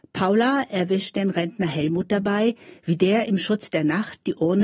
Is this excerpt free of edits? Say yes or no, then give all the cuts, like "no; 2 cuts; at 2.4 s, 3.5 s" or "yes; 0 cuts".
yes; 0 cuts